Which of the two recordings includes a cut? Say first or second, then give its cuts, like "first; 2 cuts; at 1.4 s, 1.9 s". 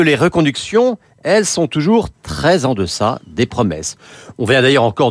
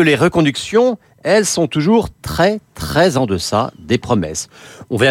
first; 1 cut; at 2.1 s